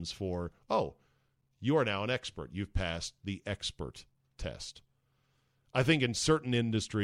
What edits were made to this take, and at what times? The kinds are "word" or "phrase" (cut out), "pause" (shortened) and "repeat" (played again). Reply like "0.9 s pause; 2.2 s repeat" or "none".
none